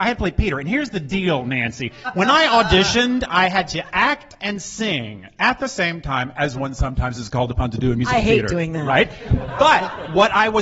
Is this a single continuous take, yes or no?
yes